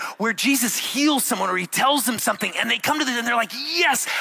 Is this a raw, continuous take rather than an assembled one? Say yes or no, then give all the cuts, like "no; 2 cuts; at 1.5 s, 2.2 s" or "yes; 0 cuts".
yes; 0 cuts